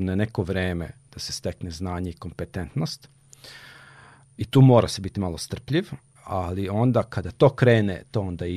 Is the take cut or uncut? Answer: uncut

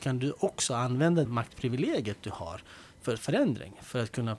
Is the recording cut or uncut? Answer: cut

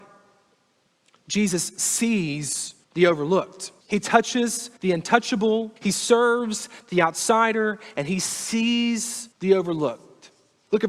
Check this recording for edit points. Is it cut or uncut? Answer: cut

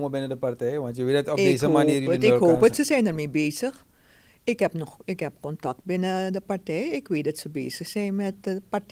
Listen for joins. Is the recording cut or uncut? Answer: uncut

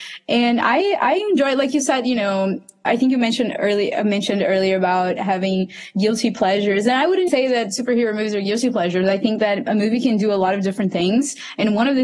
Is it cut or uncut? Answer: cut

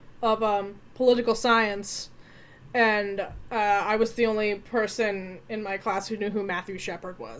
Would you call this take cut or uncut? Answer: uncut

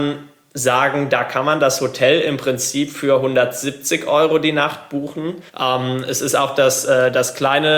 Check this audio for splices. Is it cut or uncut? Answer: cut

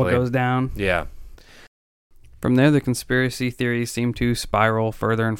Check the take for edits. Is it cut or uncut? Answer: uncut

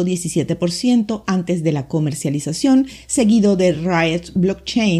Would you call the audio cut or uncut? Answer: uncut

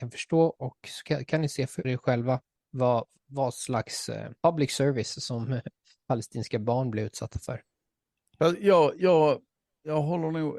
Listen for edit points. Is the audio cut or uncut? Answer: cut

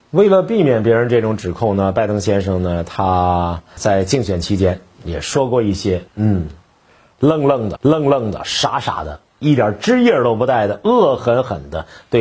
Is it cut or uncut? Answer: cut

